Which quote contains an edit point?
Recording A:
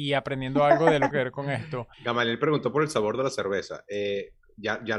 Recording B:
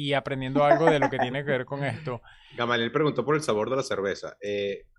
A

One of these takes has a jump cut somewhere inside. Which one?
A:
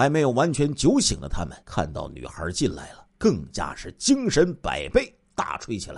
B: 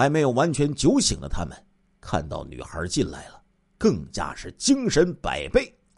A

